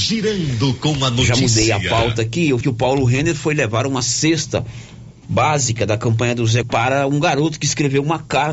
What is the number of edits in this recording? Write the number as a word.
two